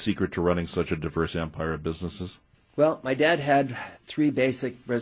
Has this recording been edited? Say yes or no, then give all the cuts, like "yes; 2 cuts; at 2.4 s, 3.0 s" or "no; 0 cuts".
no; 0 cuts